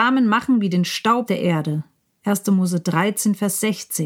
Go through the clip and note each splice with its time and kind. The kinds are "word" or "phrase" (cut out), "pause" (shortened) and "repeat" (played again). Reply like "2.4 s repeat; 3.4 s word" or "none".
1.3 s word